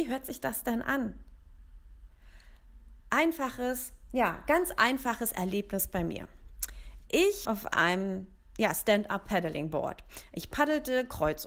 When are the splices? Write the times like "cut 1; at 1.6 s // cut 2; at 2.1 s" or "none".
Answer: cut 1; at 3.0 s // cut 2; at 7.4 s